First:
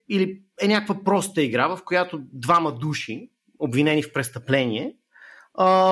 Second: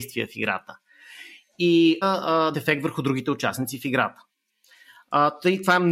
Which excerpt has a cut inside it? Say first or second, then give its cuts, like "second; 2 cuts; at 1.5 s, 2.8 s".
second; 2 cuts; at 2.0 s, 2.5 s